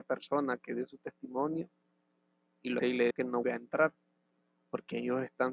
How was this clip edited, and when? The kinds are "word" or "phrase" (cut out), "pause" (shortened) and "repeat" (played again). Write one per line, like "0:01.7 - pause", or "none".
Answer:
0:02.8 - word
0:03.1 - word
0:03.4 - word